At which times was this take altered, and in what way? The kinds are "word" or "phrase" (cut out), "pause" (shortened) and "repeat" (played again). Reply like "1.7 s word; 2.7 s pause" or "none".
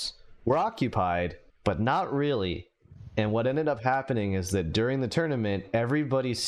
1.5 s pause